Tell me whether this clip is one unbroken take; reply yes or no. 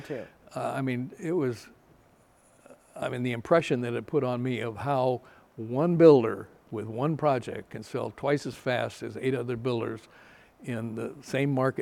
yes